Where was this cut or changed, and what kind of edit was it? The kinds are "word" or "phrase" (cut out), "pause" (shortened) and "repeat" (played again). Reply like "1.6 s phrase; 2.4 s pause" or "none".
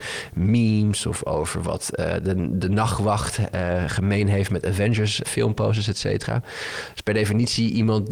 5.2 s word

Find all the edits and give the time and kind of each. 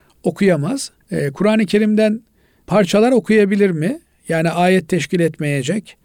1.0 s pause

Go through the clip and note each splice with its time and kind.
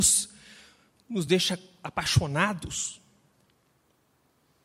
none

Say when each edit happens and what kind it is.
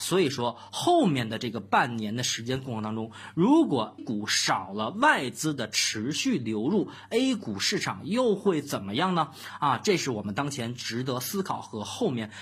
4.0 s word

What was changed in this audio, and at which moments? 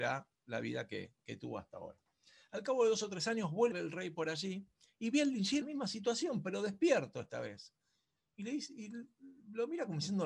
3.7 s phrase; 5.6 s word

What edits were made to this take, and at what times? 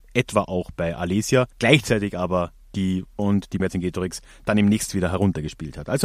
1.5 s pause; 3.2 s word; 3.6 s word; 4.9 s word

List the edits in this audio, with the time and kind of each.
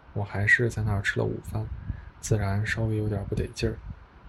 none

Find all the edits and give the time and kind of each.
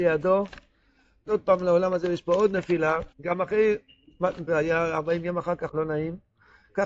1.3 s phrase; 3.1 s pause; 4.5 s word; 5.7 s phrase

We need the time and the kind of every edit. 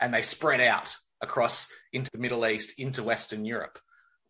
2.1 s word

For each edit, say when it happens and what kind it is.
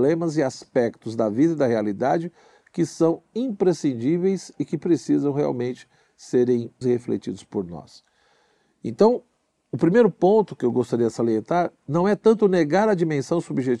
6.8 s word

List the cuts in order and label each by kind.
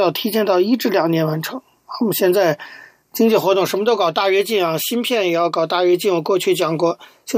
none

